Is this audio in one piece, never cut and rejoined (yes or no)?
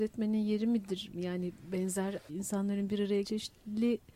no